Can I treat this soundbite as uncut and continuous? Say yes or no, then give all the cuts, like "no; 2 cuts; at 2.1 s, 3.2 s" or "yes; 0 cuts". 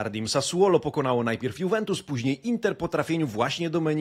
yes; 0 cuts